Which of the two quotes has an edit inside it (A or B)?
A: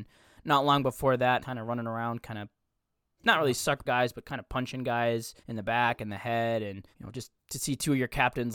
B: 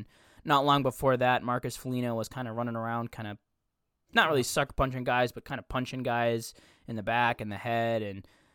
A